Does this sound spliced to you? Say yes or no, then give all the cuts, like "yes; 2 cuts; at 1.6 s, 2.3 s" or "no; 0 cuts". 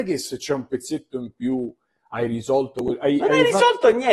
no; 0 cuts